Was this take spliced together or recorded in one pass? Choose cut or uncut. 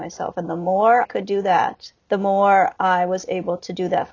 cut